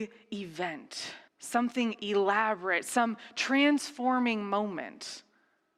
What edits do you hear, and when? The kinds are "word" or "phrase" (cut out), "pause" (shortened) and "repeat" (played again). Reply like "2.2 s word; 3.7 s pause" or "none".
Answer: 1.3 s pause